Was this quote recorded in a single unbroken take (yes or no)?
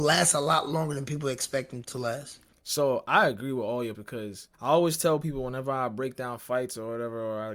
no